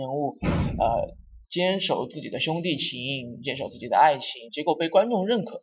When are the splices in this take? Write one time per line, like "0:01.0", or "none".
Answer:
0:01.4
0:04.5